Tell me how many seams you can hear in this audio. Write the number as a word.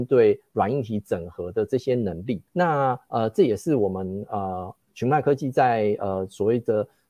two